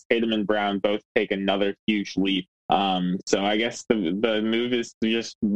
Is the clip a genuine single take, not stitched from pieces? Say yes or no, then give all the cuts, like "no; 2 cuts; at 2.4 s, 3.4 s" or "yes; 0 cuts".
no; 1 cut; at 2.6 s